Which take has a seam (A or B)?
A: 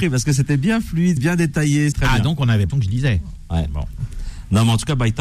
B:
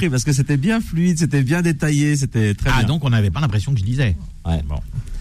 A